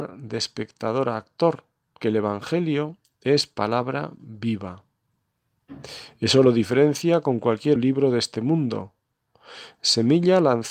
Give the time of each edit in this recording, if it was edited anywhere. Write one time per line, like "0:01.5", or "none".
0:02.0
0:07.8